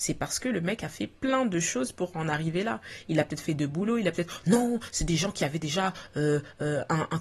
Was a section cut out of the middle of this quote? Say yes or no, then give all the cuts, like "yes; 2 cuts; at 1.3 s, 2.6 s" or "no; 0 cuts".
no; 0 cuts